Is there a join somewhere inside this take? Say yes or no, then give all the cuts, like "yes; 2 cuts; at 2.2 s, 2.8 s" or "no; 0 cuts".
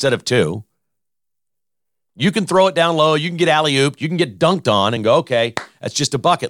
no; 0 cuts